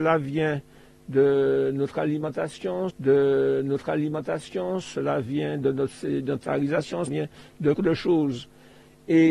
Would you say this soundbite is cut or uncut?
cut